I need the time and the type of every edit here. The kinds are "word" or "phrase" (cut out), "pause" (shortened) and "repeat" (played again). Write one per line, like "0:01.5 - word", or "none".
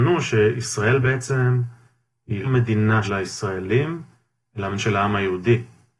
0:02.4 - word
0:03.0 - word
0:04.8 - word